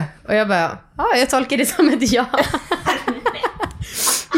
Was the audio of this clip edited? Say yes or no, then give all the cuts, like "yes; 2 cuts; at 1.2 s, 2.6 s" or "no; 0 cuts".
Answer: no; 0 cuts